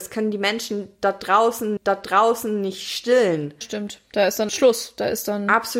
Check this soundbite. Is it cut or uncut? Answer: cut